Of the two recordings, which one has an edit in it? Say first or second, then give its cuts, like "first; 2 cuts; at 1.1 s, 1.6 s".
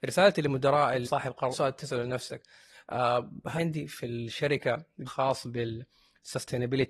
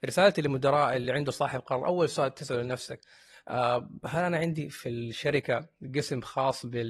first; 4 cuts; at 1.0 s, 1.5 s, 3.6 s, 5.0 s